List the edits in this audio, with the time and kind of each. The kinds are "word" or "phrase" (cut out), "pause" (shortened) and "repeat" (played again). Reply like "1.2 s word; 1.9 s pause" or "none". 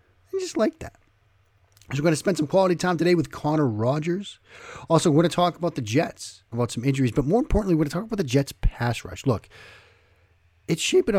6.5 s phrase